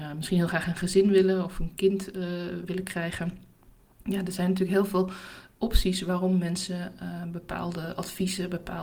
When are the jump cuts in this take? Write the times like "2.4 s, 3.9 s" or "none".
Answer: none